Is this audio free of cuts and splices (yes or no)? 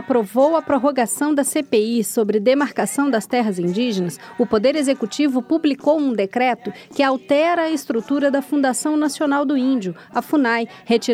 yes